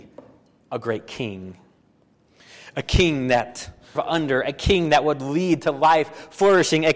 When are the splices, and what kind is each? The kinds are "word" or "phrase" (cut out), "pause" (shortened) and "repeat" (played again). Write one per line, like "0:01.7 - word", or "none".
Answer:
0:04.0 - phrase